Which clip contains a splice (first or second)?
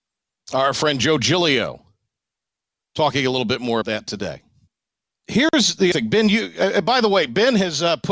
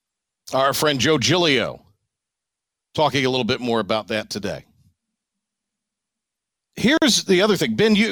first